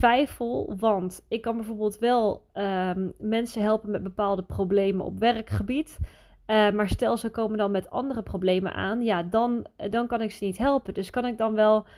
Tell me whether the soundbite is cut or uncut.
uncut